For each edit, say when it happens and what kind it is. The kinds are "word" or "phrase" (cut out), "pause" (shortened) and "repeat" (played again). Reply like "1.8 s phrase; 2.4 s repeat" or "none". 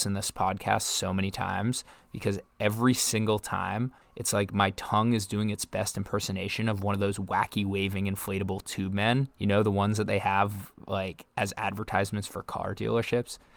4.0 s pause; 9.3 s pause; 11.3 s pause